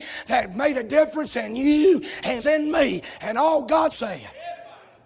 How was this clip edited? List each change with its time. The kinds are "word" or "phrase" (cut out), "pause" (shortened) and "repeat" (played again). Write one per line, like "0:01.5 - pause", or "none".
0:02.4 - phrase
0:03.9 - word